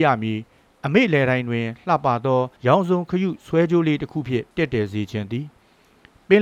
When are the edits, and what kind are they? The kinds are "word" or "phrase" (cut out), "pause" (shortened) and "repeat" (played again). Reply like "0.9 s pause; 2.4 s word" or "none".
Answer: 2.6 s pause; 4.5 s pause